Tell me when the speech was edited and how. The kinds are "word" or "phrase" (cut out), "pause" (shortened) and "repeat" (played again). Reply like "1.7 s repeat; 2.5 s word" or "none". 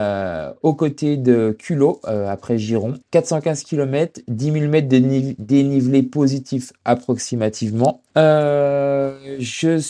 3.0 s pause; 8.1 s pause